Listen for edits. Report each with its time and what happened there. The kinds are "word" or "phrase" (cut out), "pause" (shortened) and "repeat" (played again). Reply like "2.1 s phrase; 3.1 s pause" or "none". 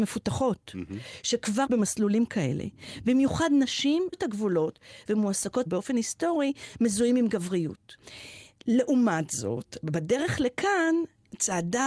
1.7 s word; 4.1 s word; 5.7 s phrase